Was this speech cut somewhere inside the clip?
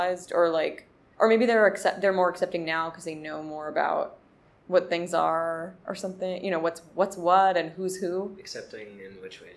no; 0 cuts

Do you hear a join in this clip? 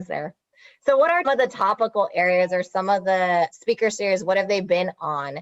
yes; 2 cuts; at 1.2 s, 3.5 s

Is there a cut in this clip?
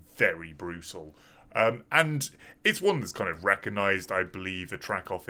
no; 0 cuts

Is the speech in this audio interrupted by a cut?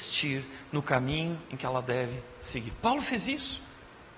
no; 0 cuts

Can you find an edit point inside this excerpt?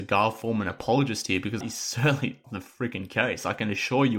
yes; 2 cuts; at 1.6 s, 2.4 s

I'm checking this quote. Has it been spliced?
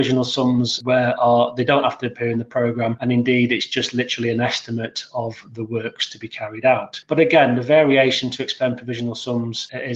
no; 0 cuts

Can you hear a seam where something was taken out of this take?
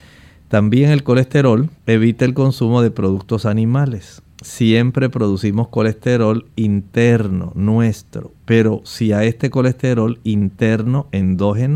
yes; 2 cuts; at 1.8 s, 4.3 s

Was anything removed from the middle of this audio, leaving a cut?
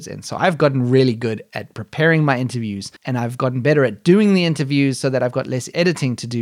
yes; 1 cut; at 3.0 s

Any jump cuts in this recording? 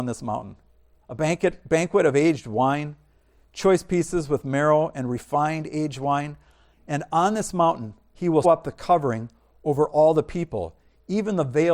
yes; 1 cut; at 8.4 s

